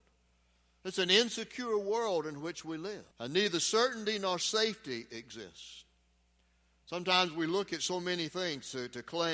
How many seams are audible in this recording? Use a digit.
1